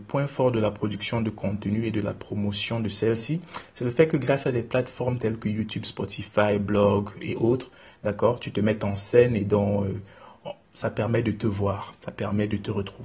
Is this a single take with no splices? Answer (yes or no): yes